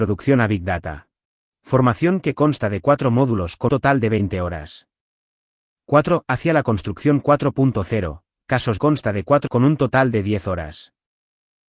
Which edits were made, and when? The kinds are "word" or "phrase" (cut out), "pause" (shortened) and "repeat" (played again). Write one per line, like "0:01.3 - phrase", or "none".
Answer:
0:01.4 - pause
0:03.7 - word
0:08.8 - phrase
0:09.5 - word